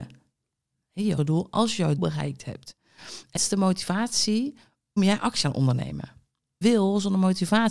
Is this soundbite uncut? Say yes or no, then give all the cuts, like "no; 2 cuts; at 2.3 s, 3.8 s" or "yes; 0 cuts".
no; 6 cuts; at 1.2 s, 2.0 s, 3.4 s, 5.0 s, 5.4 s, 6.6 s